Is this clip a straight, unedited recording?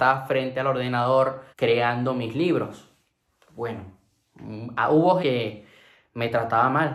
no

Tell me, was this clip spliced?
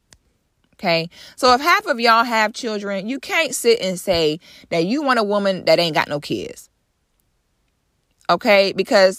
no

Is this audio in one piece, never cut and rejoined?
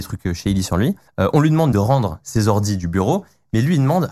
no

